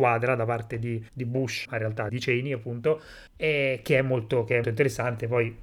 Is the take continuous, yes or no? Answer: no